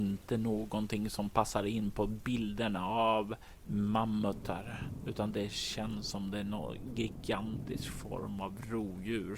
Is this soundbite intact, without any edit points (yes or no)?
yes